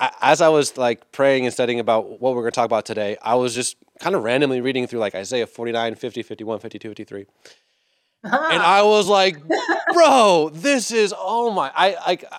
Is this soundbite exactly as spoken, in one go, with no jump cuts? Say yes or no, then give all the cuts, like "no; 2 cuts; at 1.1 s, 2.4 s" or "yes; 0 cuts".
yes; 0 cuts